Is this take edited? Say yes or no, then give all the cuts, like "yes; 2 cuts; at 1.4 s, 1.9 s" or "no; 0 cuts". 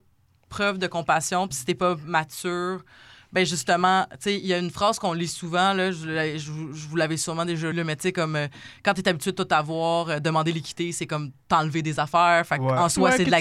yes; 1 cut; at 7.7 s